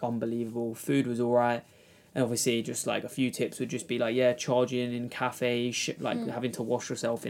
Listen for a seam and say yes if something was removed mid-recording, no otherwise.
no